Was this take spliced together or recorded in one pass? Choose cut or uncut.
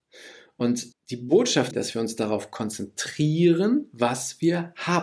cut